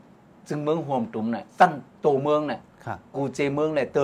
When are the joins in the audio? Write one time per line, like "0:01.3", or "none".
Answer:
0:01.5
0:01.9